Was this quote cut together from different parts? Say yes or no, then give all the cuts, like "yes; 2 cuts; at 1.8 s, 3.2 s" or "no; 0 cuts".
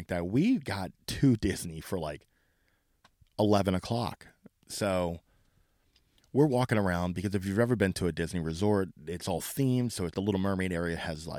yes; 1 cut; at 10.1 s